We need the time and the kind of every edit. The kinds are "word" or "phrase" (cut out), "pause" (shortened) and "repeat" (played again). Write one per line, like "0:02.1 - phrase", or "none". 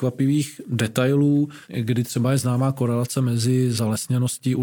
0:01.6 - pause